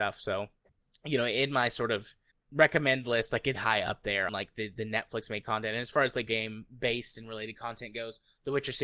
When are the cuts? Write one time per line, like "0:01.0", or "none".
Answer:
0:03.5
0:04.3
0:06.3